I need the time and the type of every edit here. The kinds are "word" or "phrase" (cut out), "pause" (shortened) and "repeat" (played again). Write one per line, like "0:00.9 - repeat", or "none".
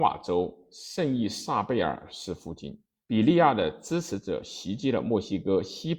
0:03.0 - pause

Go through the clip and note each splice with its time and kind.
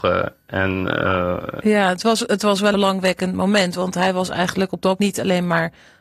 0:02.7 - word
0:05.0 - word

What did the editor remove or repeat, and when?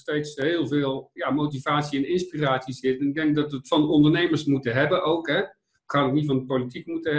0:01.2 - word

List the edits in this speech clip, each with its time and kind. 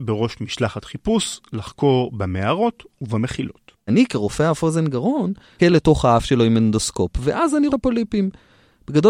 0:05.6 - word
0:07.7 - phrase

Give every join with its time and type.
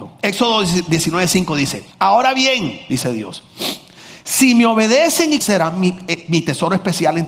0:01.9 - pause
0:05.4 - phrase

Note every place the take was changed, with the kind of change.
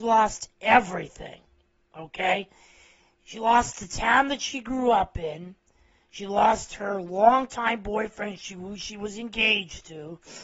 none

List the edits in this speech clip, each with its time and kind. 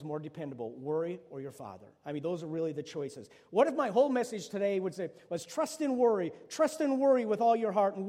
none

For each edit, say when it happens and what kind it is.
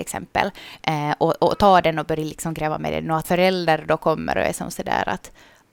0:03.2 - word

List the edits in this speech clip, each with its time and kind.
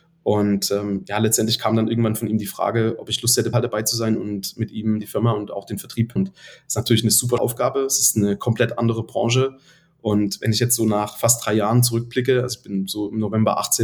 0:03.5 - word
0:05.0 - word
0:06.2 - word
0:07.4 - word

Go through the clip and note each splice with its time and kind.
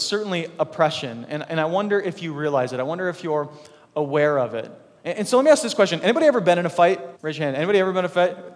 0:07.1 - pause

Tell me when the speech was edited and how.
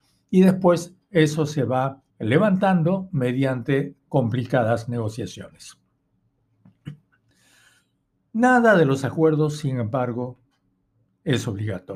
0:02.1 - pause

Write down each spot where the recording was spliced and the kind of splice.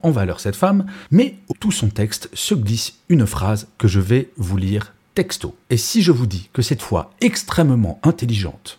0:01.5 - phrase
0:05.6 - pause
0:06.8 - phrase

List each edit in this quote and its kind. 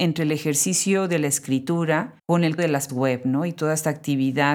0:02.2 - pause
0:02.6 - word
0:02.9 - word

